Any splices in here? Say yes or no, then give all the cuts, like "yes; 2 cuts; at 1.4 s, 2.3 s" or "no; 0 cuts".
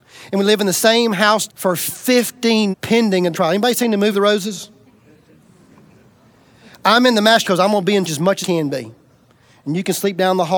yes; 7 cuts; at 1.5 s, 2.7 s, 3.3 s, 4.1 s, 7.4 s, 8.1 s, 8.4 s